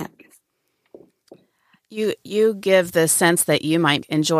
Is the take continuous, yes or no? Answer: yes